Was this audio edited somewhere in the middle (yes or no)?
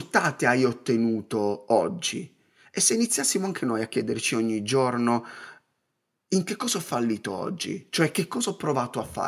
no